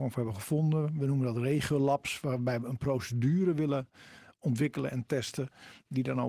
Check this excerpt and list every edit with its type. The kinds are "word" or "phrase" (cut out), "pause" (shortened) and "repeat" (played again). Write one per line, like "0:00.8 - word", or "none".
none